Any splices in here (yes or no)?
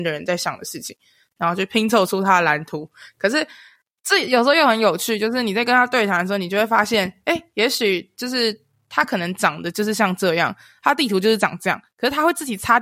no